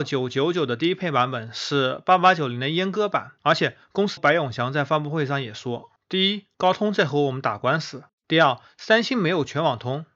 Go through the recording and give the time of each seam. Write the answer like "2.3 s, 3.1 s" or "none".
4.2 s